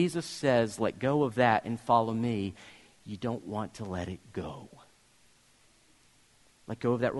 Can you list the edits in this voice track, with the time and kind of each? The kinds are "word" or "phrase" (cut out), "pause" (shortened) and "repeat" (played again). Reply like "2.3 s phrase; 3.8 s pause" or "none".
none